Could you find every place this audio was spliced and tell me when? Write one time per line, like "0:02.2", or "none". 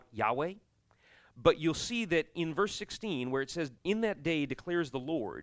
0:03.8